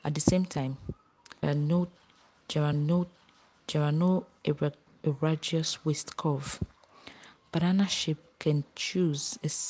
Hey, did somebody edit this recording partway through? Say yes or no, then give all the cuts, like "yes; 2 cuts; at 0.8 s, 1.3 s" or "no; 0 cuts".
yes; 3 cuts; at 1.4 s, 2.7 s, 4.9 s